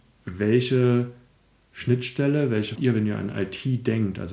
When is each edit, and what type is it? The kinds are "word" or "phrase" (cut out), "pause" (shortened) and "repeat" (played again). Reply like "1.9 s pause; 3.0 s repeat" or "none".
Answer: 2.8 s phrase